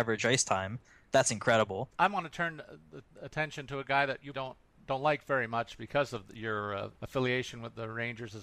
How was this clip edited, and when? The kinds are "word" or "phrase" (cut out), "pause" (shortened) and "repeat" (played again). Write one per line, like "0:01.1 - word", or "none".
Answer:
0:01.9 - pause
0:03.1 - pause
0:04.3 - word
0:06.9 - pause